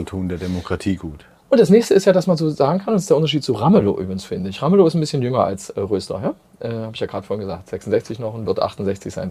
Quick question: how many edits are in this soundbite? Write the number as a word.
zero